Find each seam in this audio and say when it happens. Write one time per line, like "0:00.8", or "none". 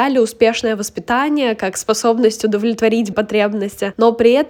0:03.1